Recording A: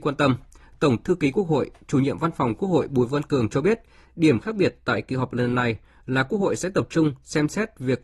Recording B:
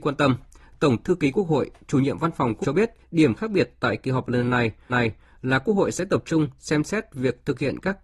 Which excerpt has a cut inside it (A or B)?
B